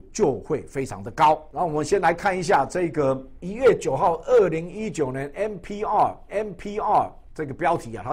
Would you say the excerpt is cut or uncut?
cut